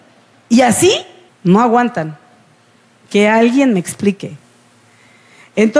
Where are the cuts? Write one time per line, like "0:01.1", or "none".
0:01.3